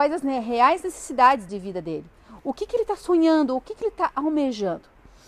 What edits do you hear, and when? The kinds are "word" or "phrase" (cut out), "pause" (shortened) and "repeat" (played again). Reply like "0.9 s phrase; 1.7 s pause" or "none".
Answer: 1.5 s phrase

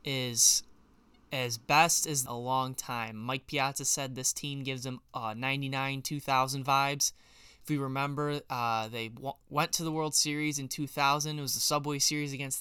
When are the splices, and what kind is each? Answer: 2.3 s phrase

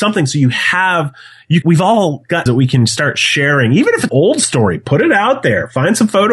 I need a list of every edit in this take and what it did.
1.6 s word; 2.5 s word; 4.1 s word

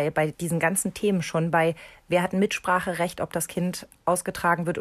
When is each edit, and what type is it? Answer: none

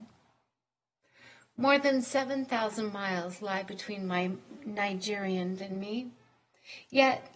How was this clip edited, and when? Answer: 5.6 s word

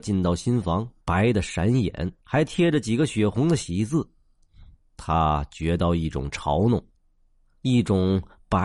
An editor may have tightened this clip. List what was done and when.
1.0 s pause; 2.2 s pause; 4.8 s pause

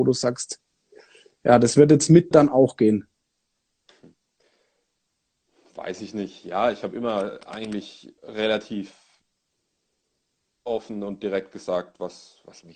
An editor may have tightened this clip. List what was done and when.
2.3 s word; 8.2 s pause

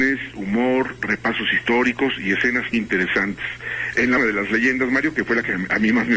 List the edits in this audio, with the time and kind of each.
2.7 s word; 4.2 s word

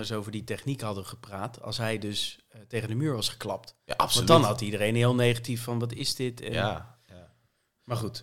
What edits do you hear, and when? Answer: none

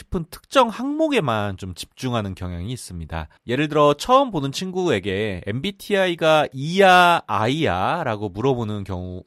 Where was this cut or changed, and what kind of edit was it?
3.4 s pause

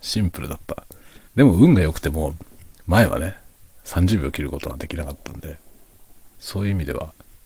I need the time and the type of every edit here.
1.2 s pause

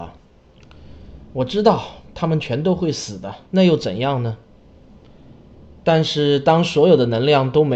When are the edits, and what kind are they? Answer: 3.5 s pause

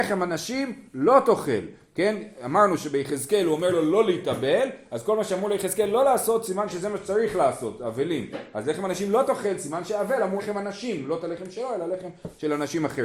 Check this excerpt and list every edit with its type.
10.4 s word

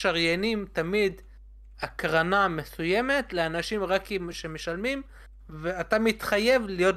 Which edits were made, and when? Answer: none

